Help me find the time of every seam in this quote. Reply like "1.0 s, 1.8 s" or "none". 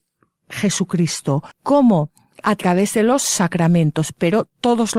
1.5 s